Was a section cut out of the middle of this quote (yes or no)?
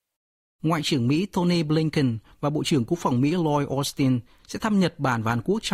no